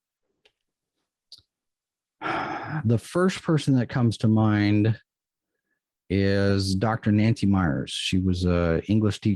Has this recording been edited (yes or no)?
no